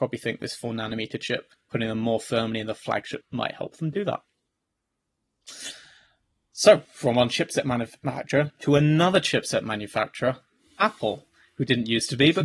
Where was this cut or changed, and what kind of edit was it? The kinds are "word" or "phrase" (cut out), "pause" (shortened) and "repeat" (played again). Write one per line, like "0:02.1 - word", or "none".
0:01.6 - pause
0:03.2 - word